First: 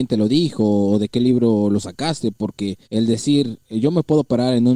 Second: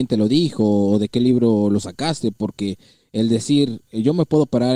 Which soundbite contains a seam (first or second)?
first